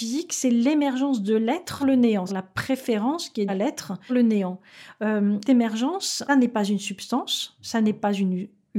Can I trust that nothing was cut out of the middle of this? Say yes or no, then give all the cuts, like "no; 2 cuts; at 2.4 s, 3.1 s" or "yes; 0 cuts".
no; 6 cuts; at 1.8 s, 2.3 s, 3.5 s, 4.1 s, 5.4 s, 6.3 s